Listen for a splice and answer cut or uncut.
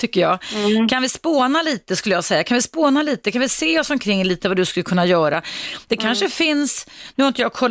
uncut